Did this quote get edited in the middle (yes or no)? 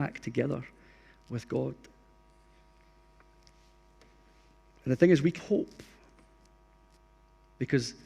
yes